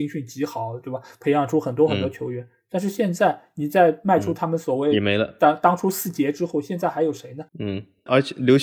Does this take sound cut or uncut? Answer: cut